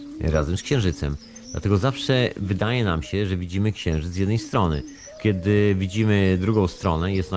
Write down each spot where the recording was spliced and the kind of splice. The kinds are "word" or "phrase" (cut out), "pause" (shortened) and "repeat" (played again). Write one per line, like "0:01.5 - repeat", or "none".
0:05.2 - word